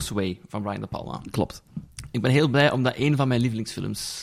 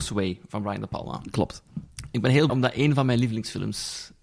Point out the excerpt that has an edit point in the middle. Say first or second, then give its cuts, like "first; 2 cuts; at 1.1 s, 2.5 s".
second; 1 cut; at 2.5 s